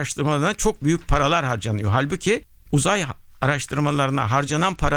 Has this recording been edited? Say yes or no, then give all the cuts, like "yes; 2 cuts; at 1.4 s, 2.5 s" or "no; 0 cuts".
no; 0 cuts